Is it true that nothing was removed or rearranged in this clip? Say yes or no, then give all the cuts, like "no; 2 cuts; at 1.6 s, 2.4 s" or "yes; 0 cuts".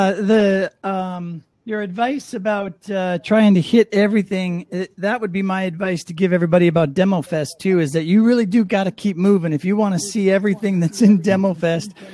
no; 1 cut; at 1.5 s